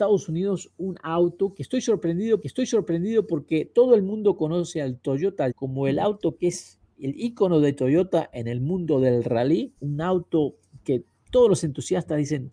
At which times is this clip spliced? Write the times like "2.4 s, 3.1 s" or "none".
2.4 s, 5.5 s, 9.8 s